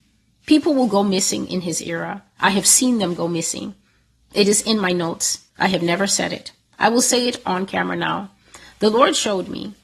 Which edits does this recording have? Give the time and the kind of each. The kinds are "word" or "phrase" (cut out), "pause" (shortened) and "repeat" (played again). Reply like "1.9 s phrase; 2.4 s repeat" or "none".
5.5 s pause